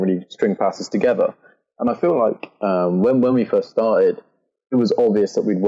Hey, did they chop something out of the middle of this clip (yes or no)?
no